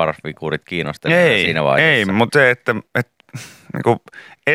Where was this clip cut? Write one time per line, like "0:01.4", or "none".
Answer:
0:02.3